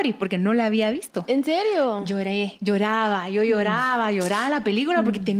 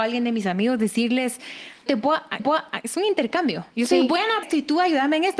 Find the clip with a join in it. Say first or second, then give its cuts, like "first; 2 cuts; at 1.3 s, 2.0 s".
second; 3 cuts; at 1.9 s, 2.4 s, 4.4 s